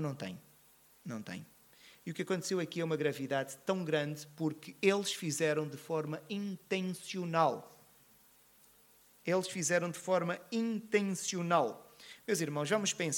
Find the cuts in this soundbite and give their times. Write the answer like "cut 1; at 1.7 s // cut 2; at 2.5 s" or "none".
none